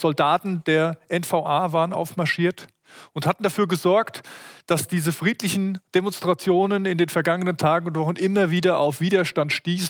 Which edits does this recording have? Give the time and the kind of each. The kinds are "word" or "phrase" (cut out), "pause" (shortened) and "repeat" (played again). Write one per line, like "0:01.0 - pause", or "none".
0:05.9 - pause